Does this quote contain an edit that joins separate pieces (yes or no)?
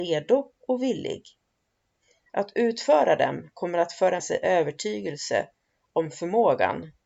yes